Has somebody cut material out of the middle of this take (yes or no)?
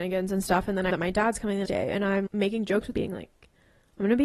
yes